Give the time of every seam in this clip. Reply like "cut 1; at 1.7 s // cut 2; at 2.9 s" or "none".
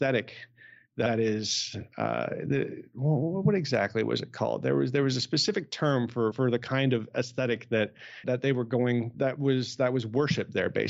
cut 1; at 8.2 s // cut 2; at 9.1 s

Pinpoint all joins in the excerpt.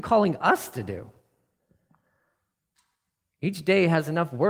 none

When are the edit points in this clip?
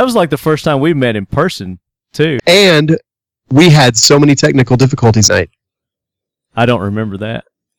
cut 1; at 2.4 s // cut 2; at 5.3 s

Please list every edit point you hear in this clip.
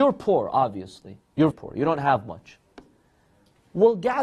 cut 1; at 1.5 s

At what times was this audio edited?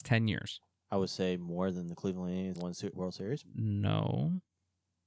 cut 1; at 2.5 s // cut 2; at 2.9 s

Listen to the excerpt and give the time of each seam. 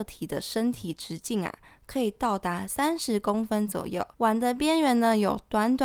cut 1; at 4.1 s

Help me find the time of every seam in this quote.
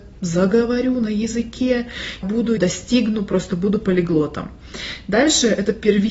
cut 1; at 2.2 s // cut 2; at 2.6 s

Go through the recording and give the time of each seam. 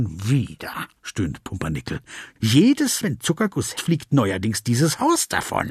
cut 1; at 1.0 s // cut 2; at 3.0 s // cut 3; at 3.7 s

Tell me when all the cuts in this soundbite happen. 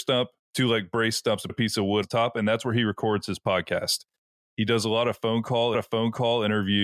cut 1; at 1.5 s // cut 2; at 2.0 s // cut 3; at 5.7 s

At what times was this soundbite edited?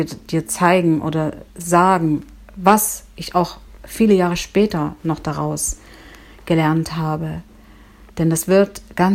none

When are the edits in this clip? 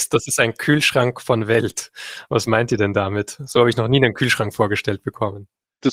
none

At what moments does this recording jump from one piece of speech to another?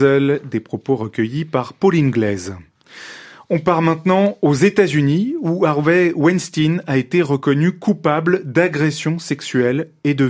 none

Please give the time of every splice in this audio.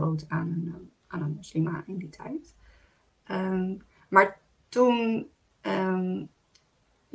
none

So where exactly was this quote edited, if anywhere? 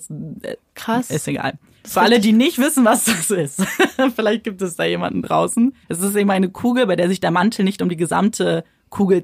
cut 1; at 5.8 s

